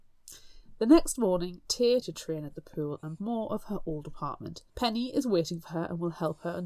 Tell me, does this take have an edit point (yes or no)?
yes